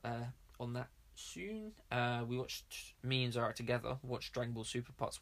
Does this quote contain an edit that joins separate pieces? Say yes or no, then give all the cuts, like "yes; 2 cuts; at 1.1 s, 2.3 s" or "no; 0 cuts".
no; 0 cuts